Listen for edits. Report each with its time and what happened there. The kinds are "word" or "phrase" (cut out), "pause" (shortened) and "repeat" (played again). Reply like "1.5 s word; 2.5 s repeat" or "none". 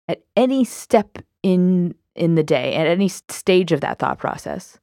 3.2 s pause

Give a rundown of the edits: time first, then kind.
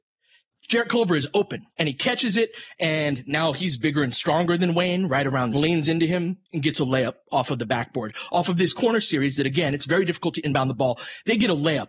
1.7 s pause; 5.5 s phrase; 6.4 s pause

